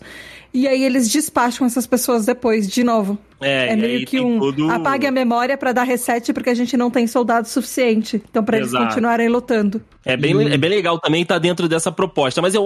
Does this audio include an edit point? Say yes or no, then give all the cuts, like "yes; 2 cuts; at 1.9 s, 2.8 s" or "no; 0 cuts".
no; 0 cuts